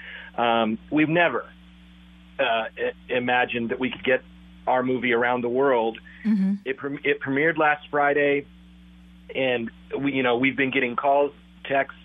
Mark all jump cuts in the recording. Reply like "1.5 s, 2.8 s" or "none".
1.0 s

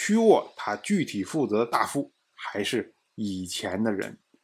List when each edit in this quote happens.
none

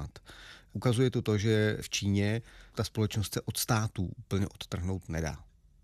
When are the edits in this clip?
none

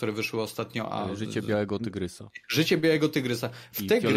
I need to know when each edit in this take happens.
2.4 s

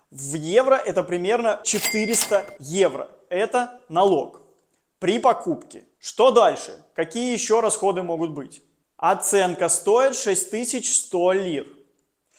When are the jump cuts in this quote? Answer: 1.6 s, 5.9 s

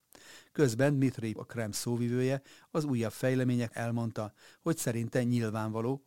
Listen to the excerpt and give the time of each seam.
1.4 s, 3.7 s

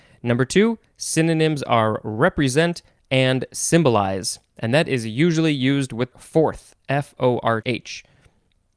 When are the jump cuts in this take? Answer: 6.1 s, 7.6 s

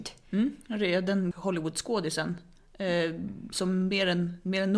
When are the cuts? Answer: 1.3 s

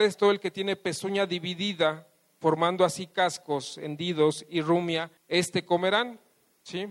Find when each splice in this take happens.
5.2 s

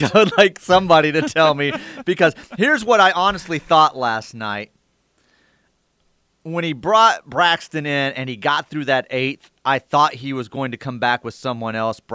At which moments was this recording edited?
none

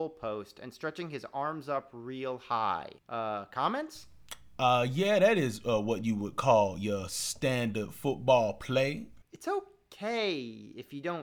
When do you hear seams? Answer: 3.0 s, 9.2 s

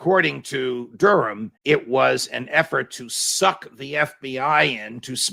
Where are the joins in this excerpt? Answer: 1.6 s

